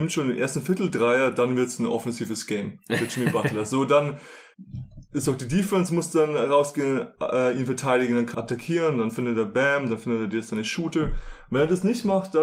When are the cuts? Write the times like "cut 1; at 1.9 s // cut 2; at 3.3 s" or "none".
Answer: cut 1; at 8.3 s